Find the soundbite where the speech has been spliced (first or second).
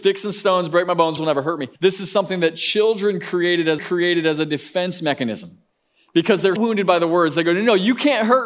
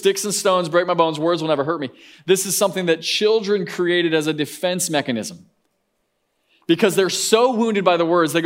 first